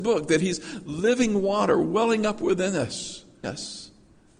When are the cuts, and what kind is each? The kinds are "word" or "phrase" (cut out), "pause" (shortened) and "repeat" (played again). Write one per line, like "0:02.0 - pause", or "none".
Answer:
0:03.4 - word